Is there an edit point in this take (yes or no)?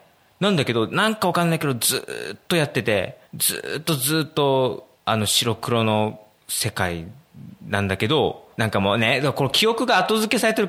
yes